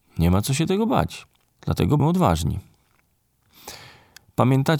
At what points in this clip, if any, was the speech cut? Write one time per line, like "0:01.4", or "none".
0:02.0